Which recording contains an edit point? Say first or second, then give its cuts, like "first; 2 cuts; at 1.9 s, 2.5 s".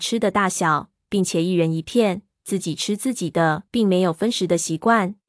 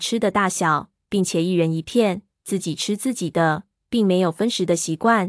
first; 1 cut; at 3.7 s